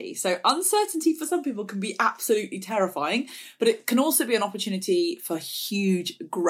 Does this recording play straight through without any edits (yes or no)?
yes